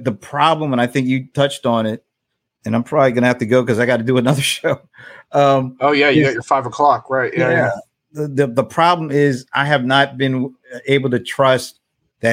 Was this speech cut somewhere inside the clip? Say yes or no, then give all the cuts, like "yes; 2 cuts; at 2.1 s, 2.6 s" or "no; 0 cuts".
no; 0 cuts